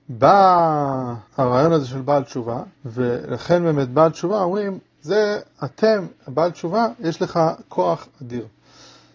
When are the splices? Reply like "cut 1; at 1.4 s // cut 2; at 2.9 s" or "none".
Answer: cut 1; at 1.3 s // cut 2; at 2.7 s // cut 3; at 5.5 s

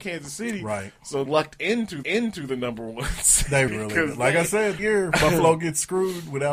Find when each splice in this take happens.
cut 1; at 1.3 s // cut 2; at 2.0 s // cut 3; at 3.7 s // cut 4; at 4.8 s

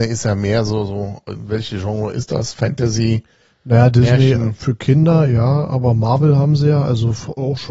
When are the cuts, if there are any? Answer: none

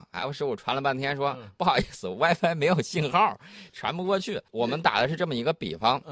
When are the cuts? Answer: cut 1; at 4.5 s

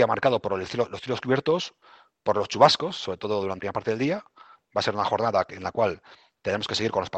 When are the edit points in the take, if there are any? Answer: cut 1; at 3.6 s

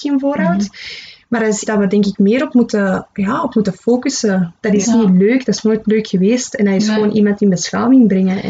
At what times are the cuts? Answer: cut 1; at 1.6 s // cut 2; at 4.8 s

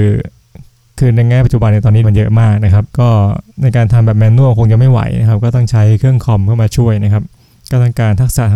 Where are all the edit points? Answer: cut 1; at 2.0 s // cut 2; at 2.9 s // cut 3; at 3.5 s

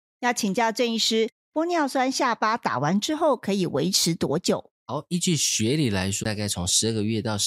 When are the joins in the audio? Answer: cut 1; at 6.2 s

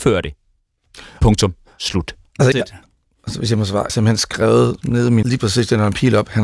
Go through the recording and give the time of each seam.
cut 1; at 2.5 s // cut 2; at 3.9 s // cut 3; at 5.2 s

